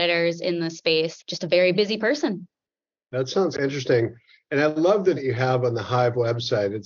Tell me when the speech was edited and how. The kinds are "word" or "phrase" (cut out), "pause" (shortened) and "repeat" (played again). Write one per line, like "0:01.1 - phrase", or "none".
0:01.2 - word
0:01.7 - word
0:03.5 - word
0:05.2 - word